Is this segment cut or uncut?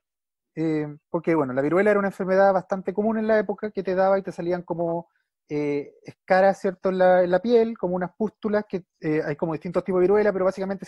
cut